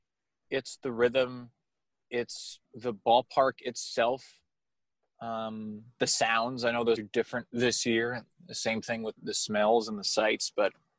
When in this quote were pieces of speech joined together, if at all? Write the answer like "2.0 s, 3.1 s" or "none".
2.6 s, 6.0 s, 7.0 s, 9.2 s